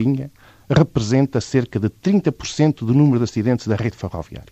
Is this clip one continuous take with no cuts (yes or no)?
yes